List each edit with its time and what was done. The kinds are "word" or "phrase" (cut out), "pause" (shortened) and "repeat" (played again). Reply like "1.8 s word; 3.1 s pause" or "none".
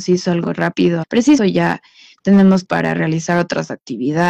1.0 s word; 1.4 s phrase; 2.6 s word